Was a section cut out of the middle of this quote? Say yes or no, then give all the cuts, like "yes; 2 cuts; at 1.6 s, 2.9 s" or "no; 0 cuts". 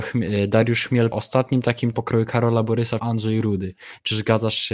yes; 3 cuts; at 1.1 s, 1.9 s, 3.0 s